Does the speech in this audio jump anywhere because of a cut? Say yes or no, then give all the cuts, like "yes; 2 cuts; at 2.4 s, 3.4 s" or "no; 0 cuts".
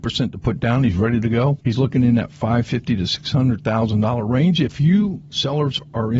no; 0 cuts